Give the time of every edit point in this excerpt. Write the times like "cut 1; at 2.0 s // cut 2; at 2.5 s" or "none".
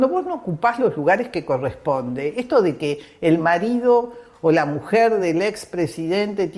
none